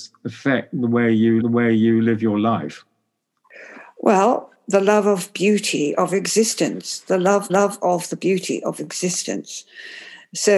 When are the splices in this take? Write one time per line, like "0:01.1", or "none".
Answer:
0:01.4
0:07.5